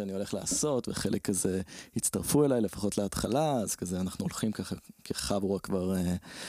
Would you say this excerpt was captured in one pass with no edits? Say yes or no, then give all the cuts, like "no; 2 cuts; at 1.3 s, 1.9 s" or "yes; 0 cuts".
yes; 0 cuts